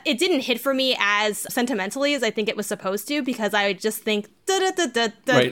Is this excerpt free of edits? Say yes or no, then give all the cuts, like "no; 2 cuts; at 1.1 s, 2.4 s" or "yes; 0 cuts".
no; 1 cut; at 1.5 s